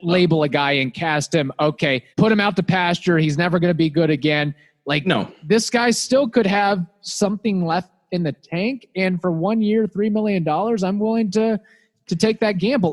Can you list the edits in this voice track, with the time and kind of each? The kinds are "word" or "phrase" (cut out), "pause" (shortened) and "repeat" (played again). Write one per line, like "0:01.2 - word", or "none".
0:02.1 - pause